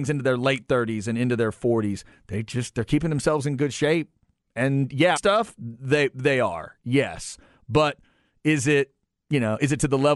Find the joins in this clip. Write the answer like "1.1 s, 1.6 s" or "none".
5.2 s